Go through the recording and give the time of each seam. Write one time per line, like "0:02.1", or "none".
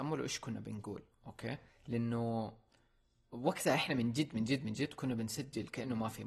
none